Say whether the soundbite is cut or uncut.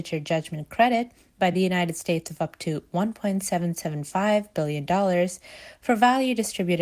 uncut